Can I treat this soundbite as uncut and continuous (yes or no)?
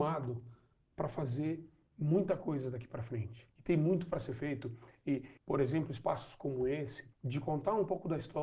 no